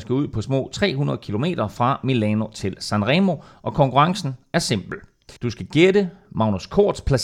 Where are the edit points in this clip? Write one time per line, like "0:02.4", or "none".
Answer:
0:05.4

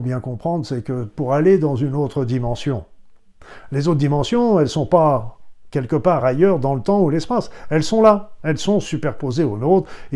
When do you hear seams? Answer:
none

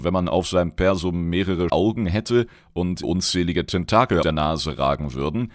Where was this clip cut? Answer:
0:01.7
0:03.0
0:04.2

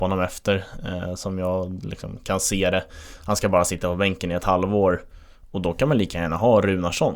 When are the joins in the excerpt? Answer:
none

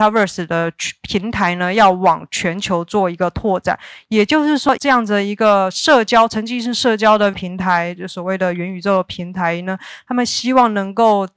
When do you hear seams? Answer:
0:04.8
0:07.3

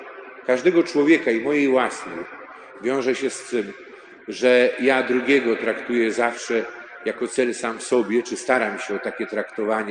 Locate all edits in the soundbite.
none

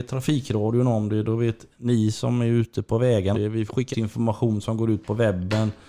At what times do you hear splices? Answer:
0:03.3
0:03.9

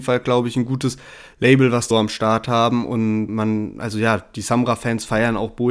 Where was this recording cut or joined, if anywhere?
0:01.9
0:03.3

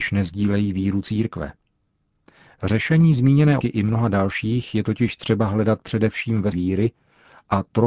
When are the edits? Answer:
0:03.6
0:06.5

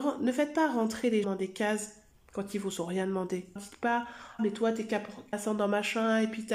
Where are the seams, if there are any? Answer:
0:01.2
0:03.6
0:04.4
0:05.3

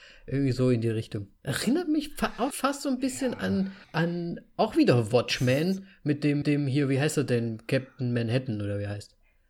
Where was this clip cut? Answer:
0:01.4
0:02.5
0:03.8
0:06.4

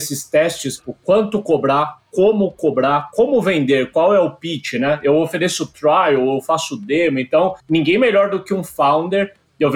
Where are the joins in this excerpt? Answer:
0:07.6

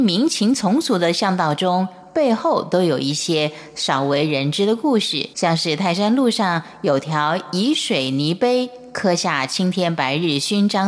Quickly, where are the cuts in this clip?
0:05.3

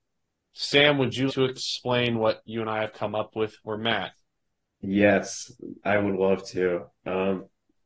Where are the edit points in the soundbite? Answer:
0:01.3

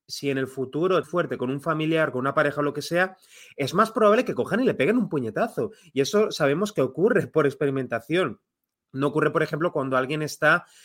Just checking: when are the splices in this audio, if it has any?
0:01.0

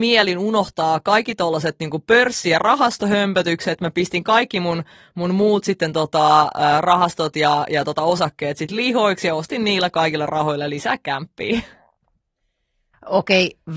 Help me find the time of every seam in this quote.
none

